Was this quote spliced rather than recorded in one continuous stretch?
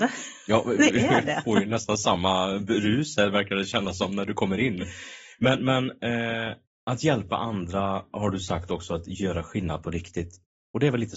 no; 0 cuts

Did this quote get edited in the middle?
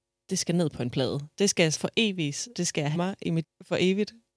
yes; 4 cuts; at 1.7 s, 2.5 s, 2.9 s, 3.4 s

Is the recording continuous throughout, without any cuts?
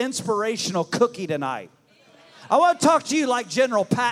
yes; 0 cuts

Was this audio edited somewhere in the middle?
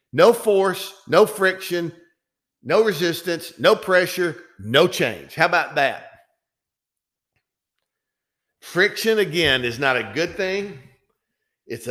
no; 0 cuts

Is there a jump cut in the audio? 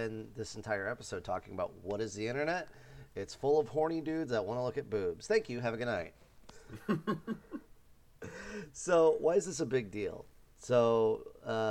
no; 0 cuts

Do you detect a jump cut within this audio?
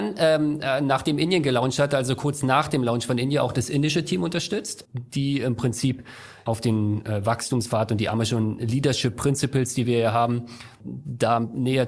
no; 0 cuts

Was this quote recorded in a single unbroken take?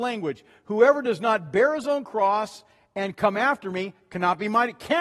yes; 0 cuts

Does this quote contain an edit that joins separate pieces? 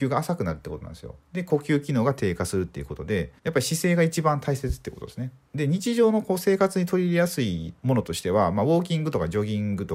yes; 1 cut; at 3.4 s

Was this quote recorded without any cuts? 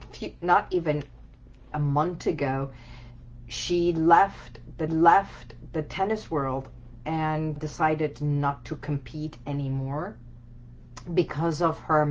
no; 3 cuts; at 1.7 s, 4.9 s, 7.6 s

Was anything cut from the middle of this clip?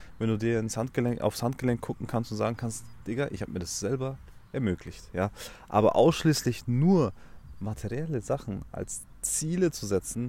no; 0 cuts

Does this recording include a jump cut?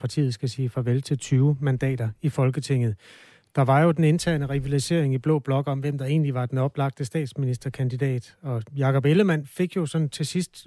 no; 0 cuts

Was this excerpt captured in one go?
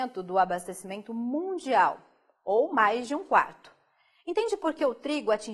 yes; 0 cuts

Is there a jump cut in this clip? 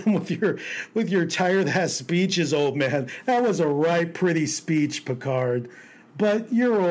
no; 0 cuts

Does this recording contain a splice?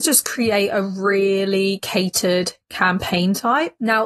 no; 0 cuts

